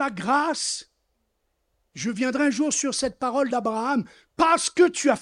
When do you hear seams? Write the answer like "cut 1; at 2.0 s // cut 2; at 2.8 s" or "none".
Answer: none